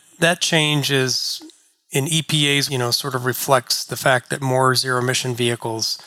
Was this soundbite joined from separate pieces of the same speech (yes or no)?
yes